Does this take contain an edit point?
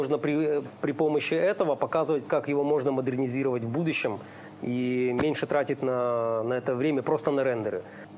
no; 0 cuts

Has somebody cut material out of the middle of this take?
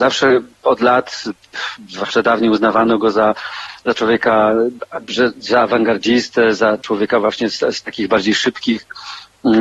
no; 0 cuts

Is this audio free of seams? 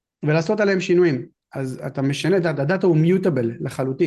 yes; 0 cuts

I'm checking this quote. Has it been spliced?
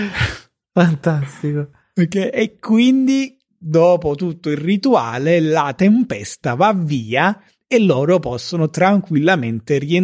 no; 0 cuts

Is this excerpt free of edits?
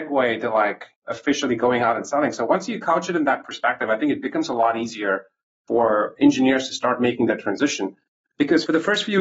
yes; 0 cuts

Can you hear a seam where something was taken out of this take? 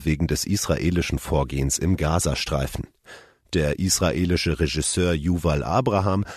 no; 0 cuts

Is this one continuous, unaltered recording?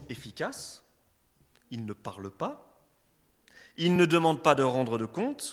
yes; 0 cuts

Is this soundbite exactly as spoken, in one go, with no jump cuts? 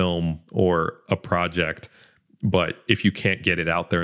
yes; 0 cuts

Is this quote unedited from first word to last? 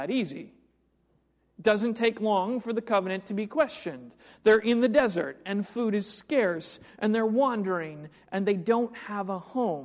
yes; 0 cuts

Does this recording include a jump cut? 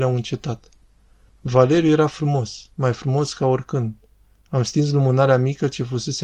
no; 0 cuts

